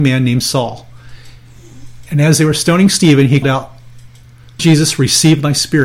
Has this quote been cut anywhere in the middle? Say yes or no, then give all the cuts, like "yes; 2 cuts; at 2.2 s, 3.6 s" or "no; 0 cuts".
yes; 2 cuts; at 3.4 s, 4.6 s